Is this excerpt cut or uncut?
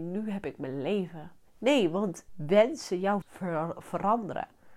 cut